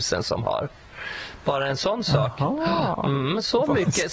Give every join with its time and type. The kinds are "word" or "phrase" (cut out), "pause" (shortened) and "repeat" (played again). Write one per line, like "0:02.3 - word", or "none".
none